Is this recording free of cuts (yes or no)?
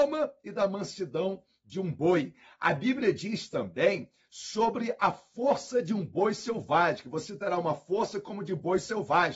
yes